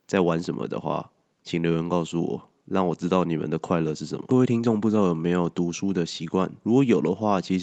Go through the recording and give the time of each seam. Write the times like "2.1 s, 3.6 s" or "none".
none